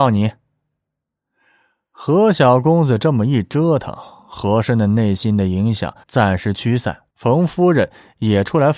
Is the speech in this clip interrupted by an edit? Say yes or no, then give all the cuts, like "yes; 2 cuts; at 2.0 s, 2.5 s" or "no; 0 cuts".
yes; 2 cuts; at 6.0 s, 7.1 s